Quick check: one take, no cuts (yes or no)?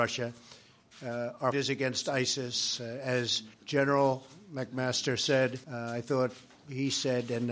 no